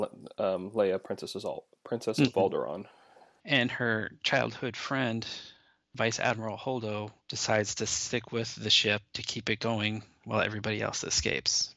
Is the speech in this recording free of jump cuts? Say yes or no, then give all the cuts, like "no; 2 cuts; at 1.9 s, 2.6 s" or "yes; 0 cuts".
yes; 0 cuts